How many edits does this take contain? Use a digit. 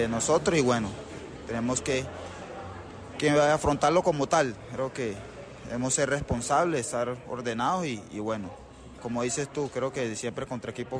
1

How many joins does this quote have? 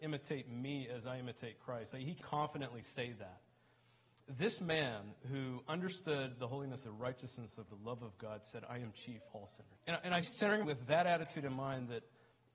7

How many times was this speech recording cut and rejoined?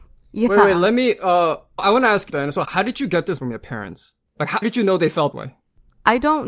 6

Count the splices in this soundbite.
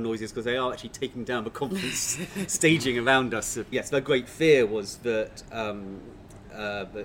1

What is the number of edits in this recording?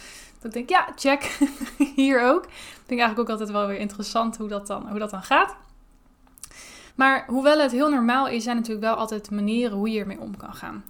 1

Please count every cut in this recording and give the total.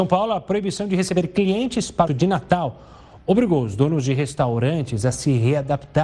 1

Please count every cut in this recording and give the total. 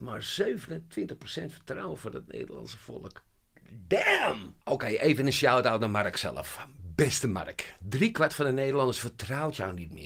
1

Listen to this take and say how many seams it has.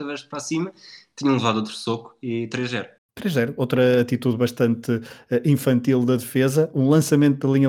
1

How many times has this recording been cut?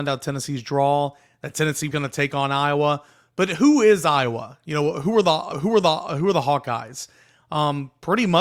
2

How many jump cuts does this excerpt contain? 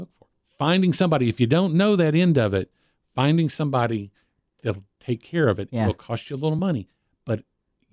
0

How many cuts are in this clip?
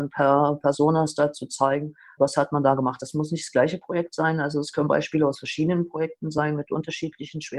0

